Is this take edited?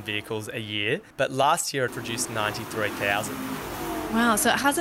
yes; 2 cuts; at 1.1 s, 1.9 s

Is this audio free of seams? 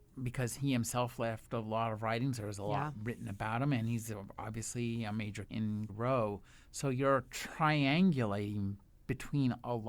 no; 2 cuts; at 5.5 s, 5.9 s

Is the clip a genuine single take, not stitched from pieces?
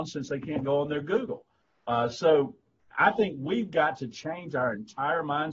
yes; 0 cuts

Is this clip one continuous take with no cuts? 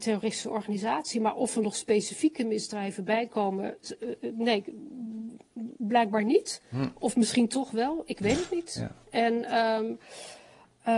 yes; 0 cuts

